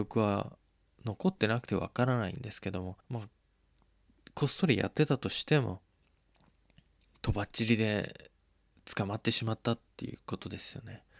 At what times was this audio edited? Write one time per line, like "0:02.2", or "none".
0:03.0